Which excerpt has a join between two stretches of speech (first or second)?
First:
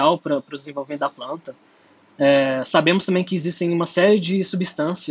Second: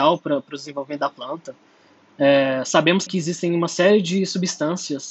second